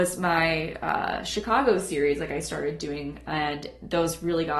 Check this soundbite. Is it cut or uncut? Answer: uncut